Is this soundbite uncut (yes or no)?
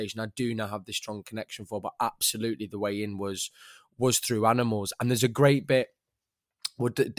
yes